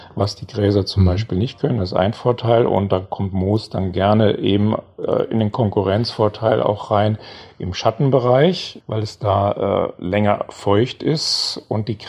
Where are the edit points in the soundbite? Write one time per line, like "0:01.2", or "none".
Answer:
none